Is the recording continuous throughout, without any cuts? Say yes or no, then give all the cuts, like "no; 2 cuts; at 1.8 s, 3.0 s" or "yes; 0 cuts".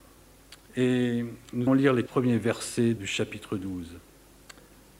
no; 3 cuts; at 1.7 s, 2.1 s, 3.0 s